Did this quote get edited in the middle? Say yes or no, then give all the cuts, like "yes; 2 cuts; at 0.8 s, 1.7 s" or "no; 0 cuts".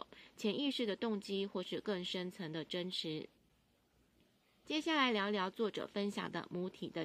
no; 0 cuts